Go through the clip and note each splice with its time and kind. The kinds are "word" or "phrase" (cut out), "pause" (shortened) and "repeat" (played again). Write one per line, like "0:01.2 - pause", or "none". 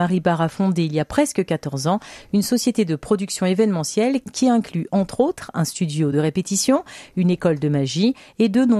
none